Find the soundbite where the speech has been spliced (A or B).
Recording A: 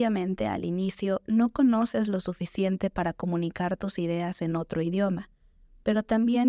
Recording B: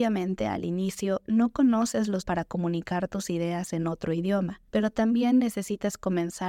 B